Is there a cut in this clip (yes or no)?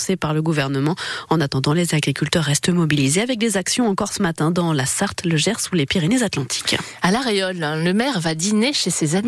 no